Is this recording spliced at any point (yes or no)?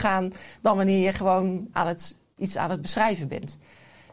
yes